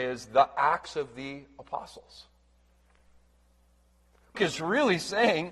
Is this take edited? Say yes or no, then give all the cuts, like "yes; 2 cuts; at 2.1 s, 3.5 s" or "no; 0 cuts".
yes; 1 cut; at 4.3 s